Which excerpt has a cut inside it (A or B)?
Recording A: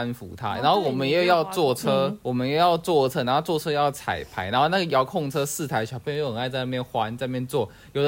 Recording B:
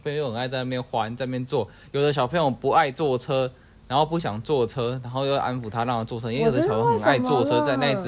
A